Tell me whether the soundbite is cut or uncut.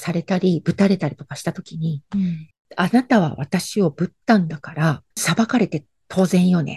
cut